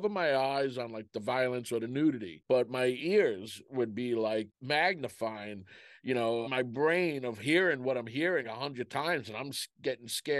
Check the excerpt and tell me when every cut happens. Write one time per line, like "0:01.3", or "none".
0:06.4
0:08.4